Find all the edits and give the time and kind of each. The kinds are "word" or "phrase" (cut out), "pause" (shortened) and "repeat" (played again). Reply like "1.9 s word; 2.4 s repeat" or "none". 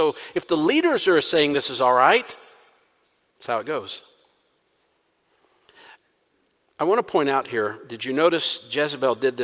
none